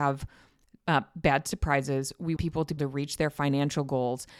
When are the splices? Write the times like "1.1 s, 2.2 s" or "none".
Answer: 2.4 s, 2.8 s